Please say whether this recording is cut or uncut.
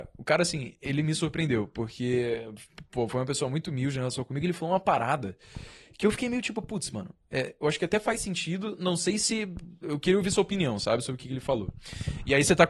uncut